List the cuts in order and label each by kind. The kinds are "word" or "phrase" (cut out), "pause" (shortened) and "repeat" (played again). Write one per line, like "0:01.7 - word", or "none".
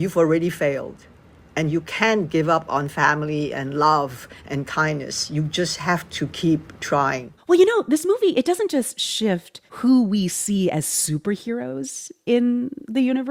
0:07.4 - pause
0:09.7 - pause